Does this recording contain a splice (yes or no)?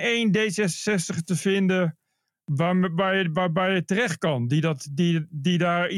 no